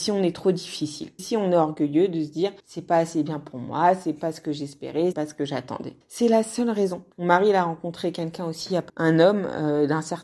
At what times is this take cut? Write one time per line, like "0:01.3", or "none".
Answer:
0:01.2
0:02.6
0:05.1
0:06.0
0:07.1
0:08.9